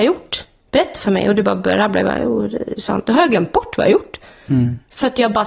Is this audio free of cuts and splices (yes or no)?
yes